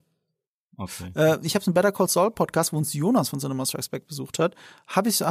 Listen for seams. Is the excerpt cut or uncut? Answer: uncut